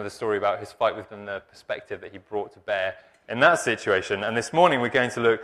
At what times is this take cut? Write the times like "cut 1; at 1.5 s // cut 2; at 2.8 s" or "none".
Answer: cut 1; at 1.1 s